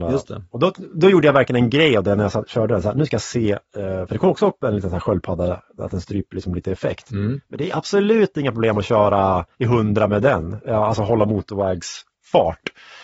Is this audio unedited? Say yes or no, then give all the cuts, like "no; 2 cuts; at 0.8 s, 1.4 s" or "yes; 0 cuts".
no; 2 cuts; at 3.6 s, 9.5 s